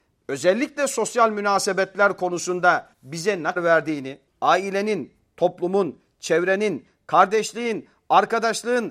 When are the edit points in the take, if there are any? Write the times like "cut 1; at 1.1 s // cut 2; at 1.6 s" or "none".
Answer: cut 1; at 2.9 s // cut 2; at 3.6 s // cut 3; at 4.3 s